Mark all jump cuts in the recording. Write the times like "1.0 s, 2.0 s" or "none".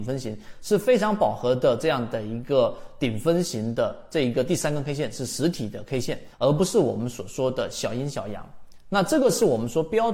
6.3 s